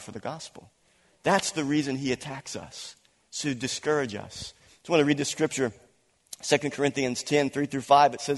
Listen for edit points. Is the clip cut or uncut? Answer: uncut